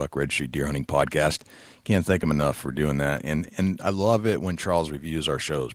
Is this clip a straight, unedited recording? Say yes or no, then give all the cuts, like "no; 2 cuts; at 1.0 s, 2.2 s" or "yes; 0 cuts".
yes; 0 cuts